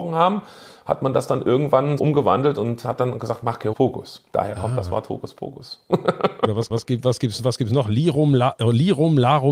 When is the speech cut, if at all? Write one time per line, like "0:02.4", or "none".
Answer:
0:02.0
0:03.7
0:04.3
0:06.7